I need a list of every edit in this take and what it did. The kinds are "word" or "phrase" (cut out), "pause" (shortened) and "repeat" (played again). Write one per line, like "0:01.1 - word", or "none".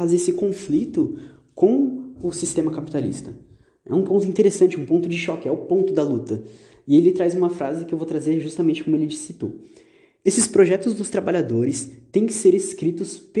none